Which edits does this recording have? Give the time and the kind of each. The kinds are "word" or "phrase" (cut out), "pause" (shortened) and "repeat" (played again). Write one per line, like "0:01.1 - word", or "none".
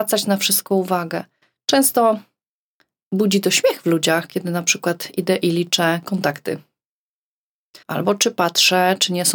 0:02.5 - pause
0:07.8 - pause